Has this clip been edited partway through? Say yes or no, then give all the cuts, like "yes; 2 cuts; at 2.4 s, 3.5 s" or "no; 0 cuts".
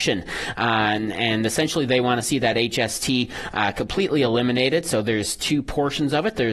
no; 0 cuts